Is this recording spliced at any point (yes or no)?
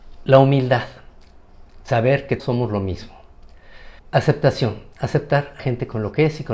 yes